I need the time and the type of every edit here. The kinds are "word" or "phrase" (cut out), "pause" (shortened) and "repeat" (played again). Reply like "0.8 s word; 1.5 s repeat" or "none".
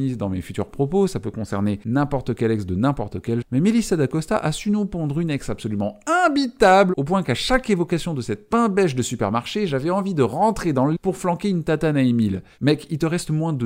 3.4 s word; 11.0 s word